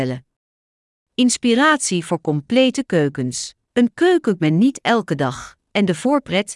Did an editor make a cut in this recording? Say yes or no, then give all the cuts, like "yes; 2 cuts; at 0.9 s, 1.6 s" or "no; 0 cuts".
yes; 2 cuts; at 3.6 s, 4.4 s